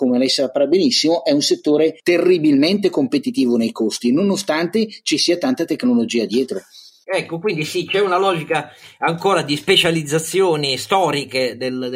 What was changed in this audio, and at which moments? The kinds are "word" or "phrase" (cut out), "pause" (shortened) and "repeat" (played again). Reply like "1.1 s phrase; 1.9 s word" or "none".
none